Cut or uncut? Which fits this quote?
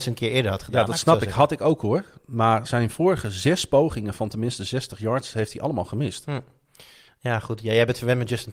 uncut